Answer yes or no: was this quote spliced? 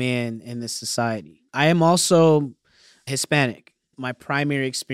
yes